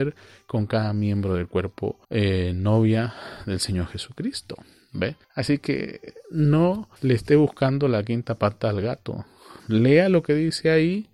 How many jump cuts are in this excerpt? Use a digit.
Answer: 4